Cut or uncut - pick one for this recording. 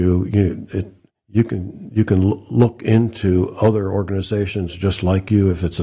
uncut